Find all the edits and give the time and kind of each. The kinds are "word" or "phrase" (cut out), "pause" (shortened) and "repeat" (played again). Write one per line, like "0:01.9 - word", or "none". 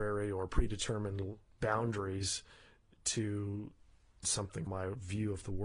0:04.2 - word
0:04.7 - word